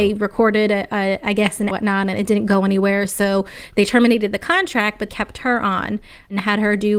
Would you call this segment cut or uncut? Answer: cut